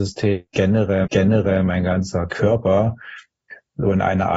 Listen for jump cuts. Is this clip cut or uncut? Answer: cut